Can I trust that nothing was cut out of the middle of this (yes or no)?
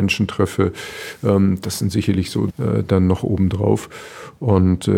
no